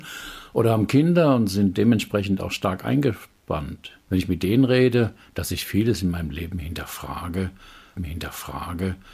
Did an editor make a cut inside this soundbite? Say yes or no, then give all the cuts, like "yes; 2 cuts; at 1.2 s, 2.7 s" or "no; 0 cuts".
yes; 2 cuts; at 4.0 s, 8.0 s